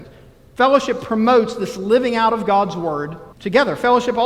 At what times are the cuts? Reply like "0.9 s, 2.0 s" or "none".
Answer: 3.3 s